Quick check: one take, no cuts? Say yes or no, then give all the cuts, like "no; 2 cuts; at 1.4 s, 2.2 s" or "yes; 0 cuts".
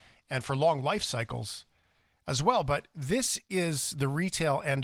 yes; 0 cuts